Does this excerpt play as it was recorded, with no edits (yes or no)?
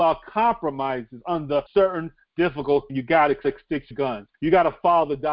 no